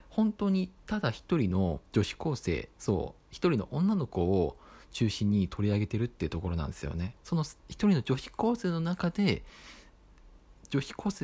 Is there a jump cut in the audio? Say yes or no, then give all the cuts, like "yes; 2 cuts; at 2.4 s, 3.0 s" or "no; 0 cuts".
yes; 4 cuts; at 1.9 s, 2.7 s, 7.2 s, 7.6 s